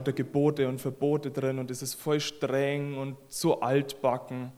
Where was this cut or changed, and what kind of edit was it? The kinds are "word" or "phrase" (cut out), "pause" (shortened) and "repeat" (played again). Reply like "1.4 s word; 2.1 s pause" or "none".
none